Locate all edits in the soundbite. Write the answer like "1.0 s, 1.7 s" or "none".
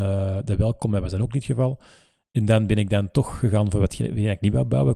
none

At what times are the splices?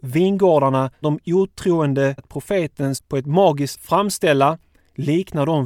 1.0 s, 2.2 s, 2.9 s, 3.7 s

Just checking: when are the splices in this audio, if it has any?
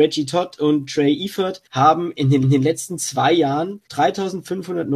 1.7 s, 2.4 s, 3.9 s

